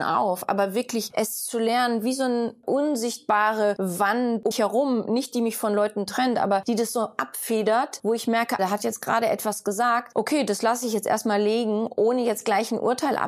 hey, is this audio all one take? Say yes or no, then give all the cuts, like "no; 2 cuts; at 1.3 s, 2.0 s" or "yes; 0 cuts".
no; 2 cuts; at 4.5 s, 8.6 s